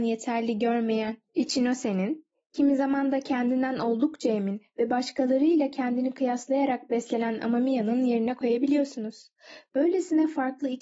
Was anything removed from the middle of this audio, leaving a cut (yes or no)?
no